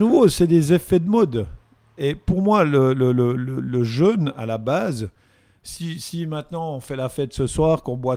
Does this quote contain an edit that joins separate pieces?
no; 0 cuts

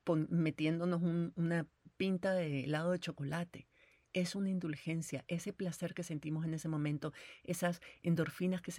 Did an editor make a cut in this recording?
no; 0 cuts

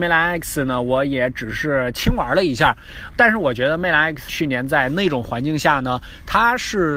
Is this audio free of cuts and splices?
no; 2 cuts; at 3.1 s, 4.3 s

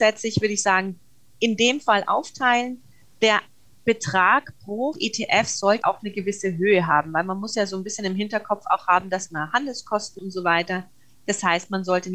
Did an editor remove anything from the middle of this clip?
yes; 3 cuts; at 4.9 s, 5.8 s, 10.2 s

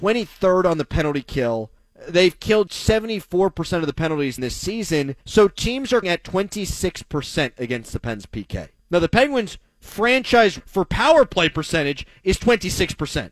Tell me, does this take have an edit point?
yes; 7 cuts; at 1.8 s, 2.7 s, 4.4 s, 5.2 s, 6.0 s, 8.8 s, 10.6 s

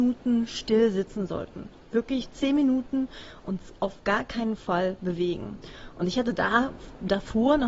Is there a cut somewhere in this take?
no; 0 cuts

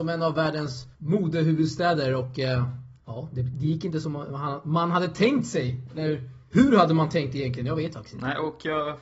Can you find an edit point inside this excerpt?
yes; 2 cuts; at 0.9 s, 3.0 s

